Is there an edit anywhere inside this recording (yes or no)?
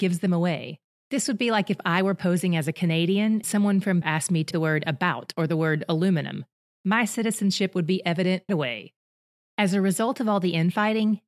yes